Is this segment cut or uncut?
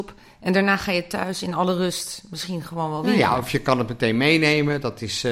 uncut